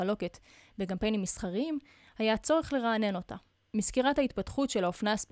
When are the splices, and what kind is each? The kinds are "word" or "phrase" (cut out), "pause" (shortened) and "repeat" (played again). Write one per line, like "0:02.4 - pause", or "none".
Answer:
none

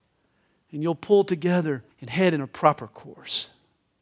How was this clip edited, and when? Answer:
0:01.9 - pause

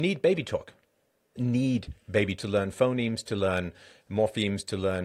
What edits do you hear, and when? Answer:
0:01.4 - word
0:02.4 - word

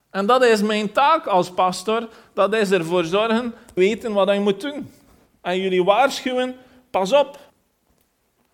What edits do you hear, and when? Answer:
0:03.8 - word

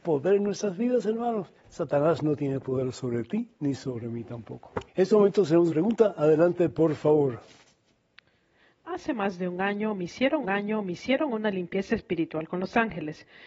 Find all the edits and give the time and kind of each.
0:01.6 - pause
0:04.9 - pause
0:05.7 - phrase
0:10.4 - repeat

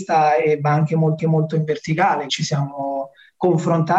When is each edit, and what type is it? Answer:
0:01.2 - repeat
0:02.3 - word

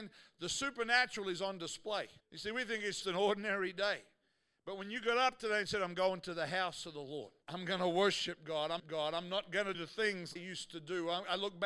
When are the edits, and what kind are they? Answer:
0:02.2 - pause
0:03.0 - word
0:07.4 - pause
0:08.8 - repeat
0:09.7 - word
0:10.4 - word

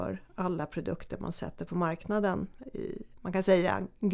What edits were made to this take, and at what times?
0:02.6 - word

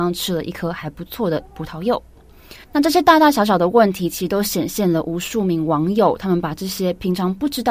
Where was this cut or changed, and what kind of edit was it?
0:02.6 - pause

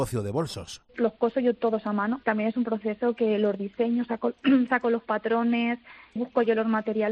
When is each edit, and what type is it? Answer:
0:02.2 - word
0:06.2 - word

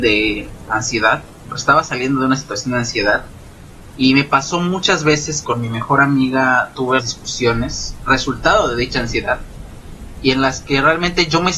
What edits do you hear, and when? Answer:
0:05.4 - word
0:07.0 - word

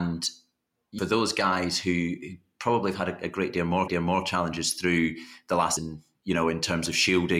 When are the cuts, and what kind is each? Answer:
0:01.0 - phrase
0:03.9 - repeat
0:05.8 - phrase

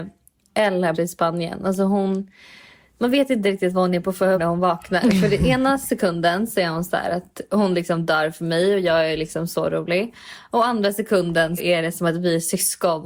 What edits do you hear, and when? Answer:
0:00.9 - word
0:04.3 - word
0:11.6 - word

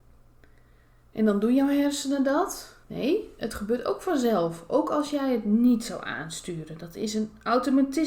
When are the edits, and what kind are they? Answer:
0:02.8 - pause

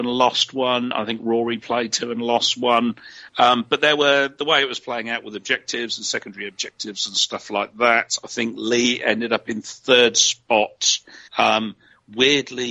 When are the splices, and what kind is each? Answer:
0:11.3 - pause

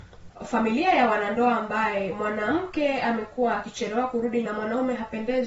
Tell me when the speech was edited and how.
0:04.5 - word

